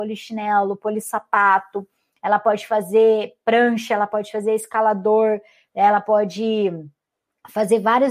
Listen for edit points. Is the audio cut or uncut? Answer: uncut